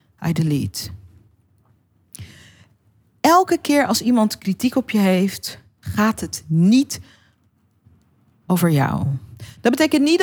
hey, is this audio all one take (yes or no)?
yes